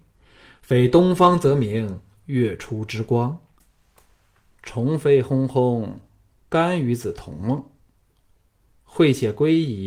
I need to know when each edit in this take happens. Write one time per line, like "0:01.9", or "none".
none